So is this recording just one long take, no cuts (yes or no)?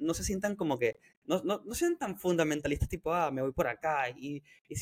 no